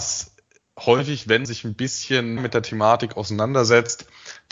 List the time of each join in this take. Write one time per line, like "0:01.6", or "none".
0:01.4
0:02.4